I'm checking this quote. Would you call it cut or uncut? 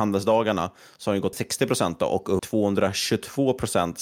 cut